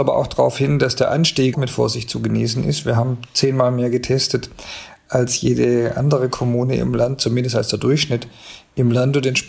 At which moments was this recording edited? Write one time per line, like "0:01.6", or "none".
0:01.5